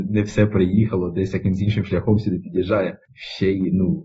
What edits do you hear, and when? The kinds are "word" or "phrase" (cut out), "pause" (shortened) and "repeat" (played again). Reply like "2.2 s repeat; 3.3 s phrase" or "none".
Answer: none